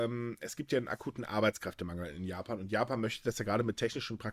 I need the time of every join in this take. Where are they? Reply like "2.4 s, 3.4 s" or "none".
none